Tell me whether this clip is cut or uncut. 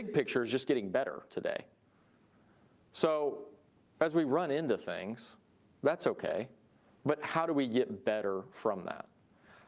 uncut